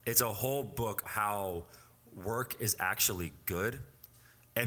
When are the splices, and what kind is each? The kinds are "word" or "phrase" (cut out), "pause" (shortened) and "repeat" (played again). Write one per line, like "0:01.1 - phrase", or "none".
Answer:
0:01.0 - word